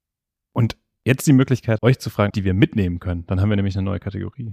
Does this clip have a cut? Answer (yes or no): yes